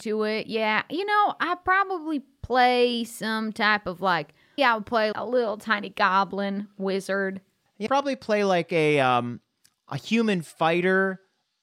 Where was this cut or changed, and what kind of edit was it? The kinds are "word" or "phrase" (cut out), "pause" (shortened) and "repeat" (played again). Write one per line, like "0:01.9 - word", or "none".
0:04.6 - word
0:05.1 - word
0:07.9 - word